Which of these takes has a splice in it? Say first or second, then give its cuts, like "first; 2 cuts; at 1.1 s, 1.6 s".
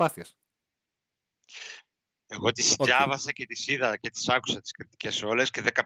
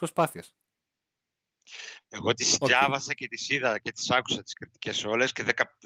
second; 1 cut; at 2.0 s